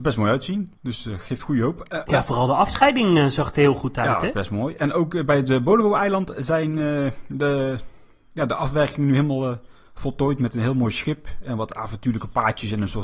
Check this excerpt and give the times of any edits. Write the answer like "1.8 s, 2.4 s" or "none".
none